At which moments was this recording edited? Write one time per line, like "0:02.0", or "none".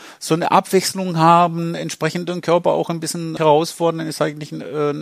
0:03.4